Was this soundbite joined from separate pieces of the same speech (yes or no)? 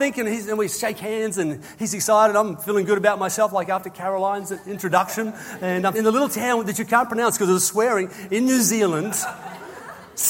yes